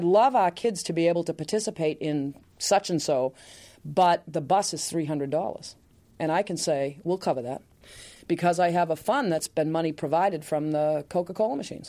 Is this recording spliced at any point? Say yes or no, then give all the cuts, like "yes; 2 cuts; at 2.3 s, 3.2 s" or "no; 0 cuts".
no; 0 cuts